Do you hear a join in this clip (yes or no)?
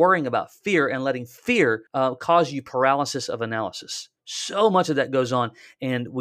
yes